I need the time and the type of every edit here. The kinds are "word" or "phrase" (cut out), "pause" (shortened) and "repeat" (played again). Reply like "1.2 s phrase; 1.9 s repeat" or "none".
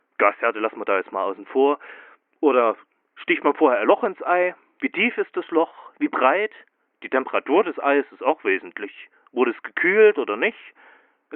none